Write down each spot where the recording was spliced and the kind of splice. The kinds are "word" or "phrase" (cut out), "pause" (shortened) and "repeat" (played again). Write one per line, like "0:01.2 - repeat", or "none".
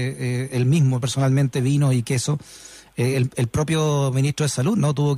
none